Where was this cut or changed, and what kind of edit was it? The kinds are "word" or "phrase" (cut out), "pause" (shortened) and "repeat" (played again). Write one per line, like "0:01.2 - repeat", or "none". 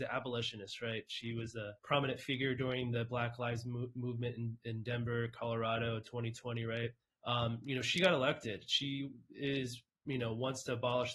0:01.8 - pause
0:07.0 - pause